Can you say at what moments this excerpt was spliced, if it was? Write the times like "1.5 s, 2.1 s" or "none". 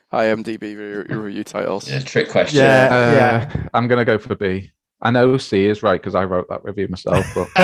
none